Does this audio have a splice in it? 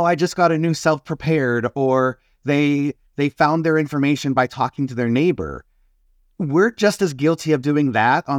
no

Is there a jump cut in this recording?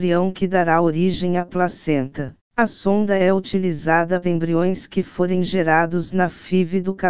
yes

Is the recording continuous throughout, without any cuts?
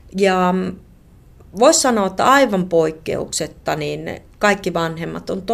yes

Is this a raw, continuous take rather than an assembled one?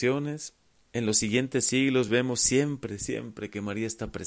yes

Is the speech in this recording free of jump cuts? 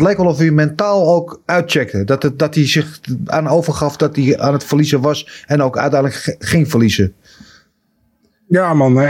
yes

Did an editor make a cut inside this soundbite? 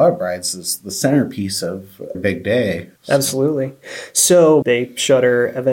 yes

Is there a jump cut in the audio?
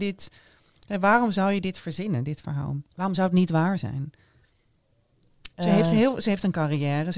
yes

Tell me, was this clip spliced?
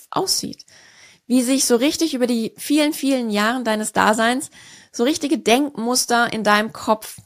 no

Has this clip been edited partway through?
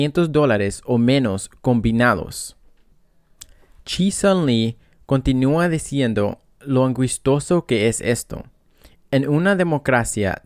no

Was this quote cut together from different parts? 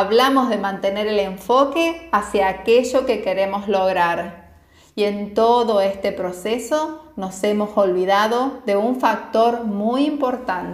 no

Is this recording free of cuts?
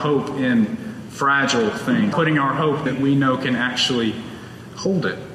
no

